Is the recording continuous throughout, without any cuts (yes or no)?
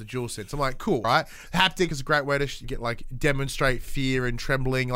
no